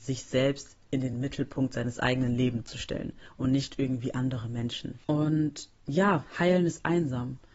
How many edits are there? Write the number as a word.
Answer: zero